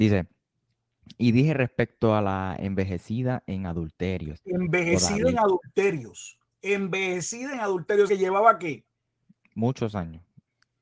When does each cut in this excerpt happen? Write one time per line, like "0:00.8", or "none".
0:08.1